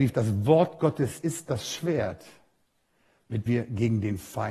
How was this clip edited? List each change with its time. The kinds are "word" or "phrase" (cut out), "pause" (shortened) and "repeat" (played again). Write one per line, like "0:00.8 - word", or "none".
0:01.2 - word
0:03.5 - word